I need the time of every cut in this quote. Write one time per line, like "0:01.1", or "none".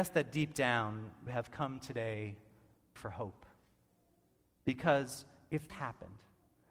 0:01.3
0:03.0
0:05.7